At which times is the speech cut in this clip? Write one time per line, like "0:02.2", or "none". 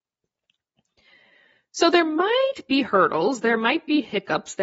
none